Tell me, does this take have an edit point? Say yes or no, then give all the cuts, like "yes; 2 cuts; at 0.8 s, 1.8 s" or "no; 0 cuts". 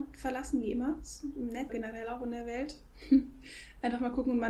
yes; 1 cut; at 1.7 s